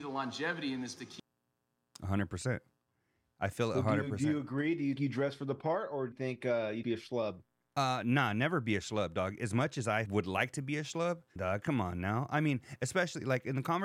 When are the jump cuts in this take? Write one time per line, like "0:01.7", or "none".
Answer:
0:01.0
0:05.0
0:06.1
0:06.8
0:10.1
0:11.4